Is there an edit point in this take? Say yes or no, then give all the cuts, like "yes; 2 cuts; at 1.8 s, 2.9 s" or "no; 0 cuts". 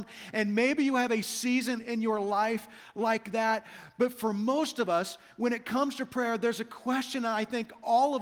no; 0 cuts